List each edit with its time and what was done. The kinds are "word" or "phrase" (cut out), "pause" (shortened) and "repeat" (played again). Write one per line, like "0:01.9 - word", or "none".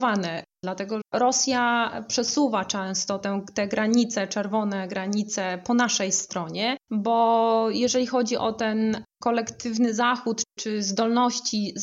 0:01.0 - word